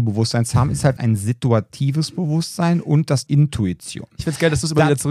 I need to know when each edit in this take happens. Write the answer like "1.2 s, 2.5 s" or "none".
1.0 s, 3.3 s